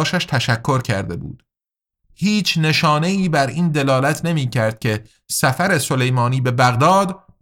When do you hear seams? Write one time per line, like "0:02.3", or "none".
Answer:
none